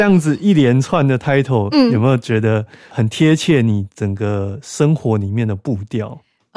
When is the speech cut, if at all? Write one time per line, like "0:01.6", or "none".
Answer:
none